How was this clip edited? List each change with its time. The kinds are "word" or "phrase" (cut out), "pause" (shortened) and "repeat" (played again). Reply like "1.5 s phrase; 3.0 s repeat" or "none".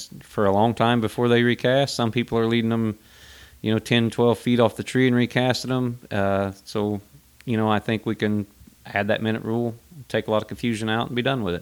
none